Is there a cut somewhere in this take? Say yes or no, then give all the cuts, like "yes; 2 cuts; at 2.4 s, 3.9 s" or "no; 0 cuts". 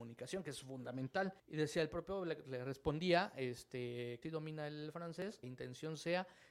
yes; 3 cuts; at 1.4 s, 4.2 s, 5.4 s